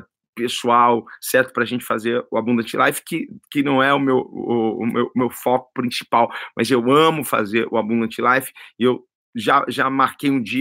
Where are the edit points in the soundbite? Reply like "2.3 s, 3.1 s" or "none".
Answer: 9.2 s